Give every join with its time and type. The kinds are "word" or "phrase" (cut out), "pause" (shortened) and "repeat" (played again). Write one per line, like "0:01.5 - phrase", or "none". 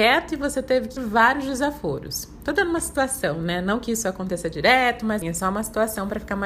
0:01.0 - word
0:05.2 - word